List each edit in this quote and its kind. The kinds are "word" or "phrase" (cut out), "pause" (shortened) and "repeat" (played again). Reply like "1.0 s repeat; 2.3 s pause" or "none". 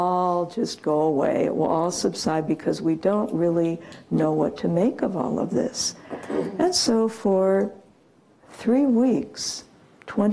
none